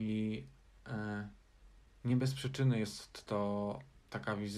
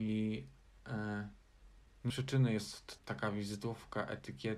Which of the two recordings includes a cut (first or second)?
second